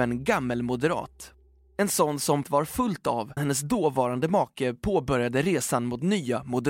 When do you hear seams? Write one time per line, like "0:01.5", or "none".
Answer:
0:02.4
0:03.4